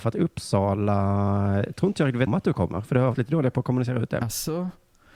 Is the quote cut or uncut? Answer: cut